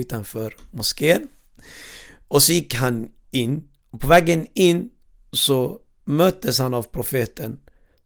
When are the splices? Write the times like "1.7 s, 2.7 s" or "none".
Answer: none

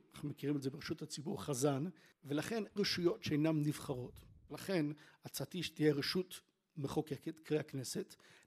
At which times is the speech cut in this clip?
2.8 s

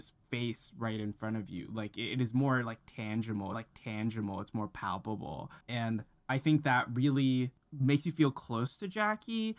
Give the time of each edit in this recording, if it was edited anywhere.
3.5 s, 5.6 s

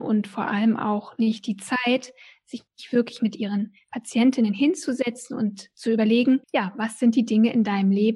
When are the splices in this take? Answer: 2.7 s, 6.4 s

